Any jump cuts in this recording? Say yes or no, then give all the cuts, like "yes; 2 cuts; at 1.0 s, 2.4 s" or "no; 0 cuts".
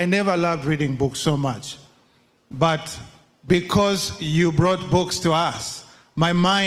no; 0 cuts